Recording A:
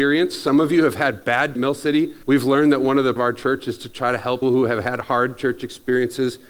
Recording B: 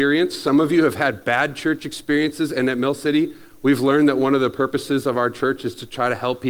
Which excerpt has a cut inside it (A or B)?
A